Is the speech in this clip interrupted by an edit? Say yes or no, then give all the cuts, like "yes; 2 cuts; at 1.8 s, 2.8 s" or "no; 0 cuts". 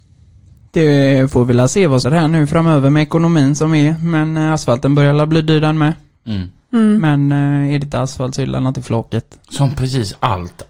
yes; 3 cuts; at 2.0 s, 8.7 s, 9.4 s